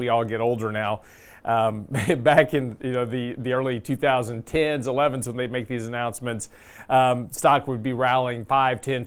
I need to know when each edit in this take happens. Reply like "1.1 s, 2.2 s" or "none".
none